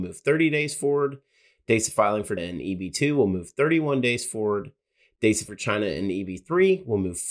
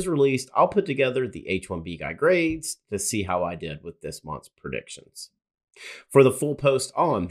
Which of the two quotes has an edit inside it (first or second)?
first